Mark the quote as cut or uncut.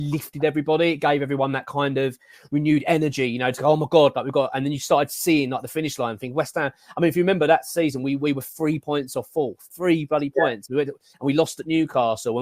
uncut